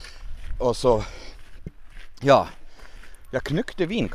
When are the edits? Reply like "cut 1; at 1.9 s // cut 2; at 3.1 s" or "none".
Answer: none